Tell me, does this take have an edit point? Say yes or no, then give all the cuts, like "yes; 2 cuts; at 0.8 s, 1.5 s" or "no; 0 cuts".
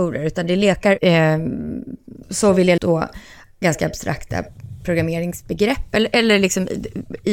yes; 3 cuts; at 1.0 s, 2.2 s, 2.8 s